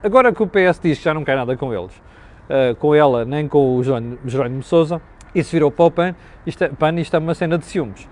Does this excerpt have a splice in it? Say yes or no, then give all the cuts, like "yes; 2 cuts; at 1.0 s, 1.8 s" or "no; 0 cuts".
yes; 1 cut; at 5.1 s